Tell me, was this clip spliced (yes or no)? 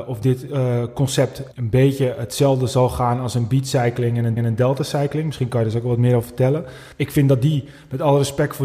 yes